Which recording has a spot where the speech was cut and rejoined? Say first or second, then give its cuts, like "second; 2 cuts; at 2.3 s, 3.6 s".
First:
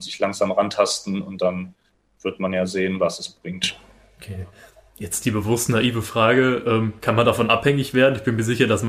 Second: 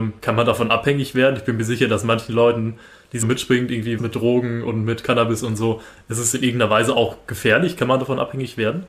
second; 2 cuts; at 3.2 s, 4.0 s